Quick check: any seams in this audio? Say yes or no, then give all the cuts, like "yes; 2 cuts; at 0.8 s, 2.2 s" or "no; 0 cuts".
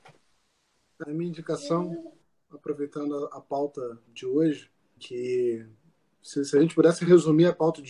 yes; 3 cuts; at 1.0 s, 4.1 s, 5.0 s